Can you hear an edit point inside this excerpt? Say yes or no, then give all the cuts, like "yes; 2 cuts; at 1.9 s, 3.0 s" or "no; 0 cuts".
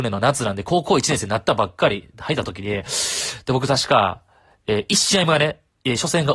no; 0 cuts